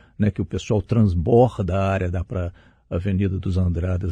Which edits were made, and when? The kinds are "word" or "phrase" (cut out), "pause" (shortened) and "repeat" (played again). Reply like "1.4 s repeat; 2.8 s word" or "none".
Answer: 2.3 s word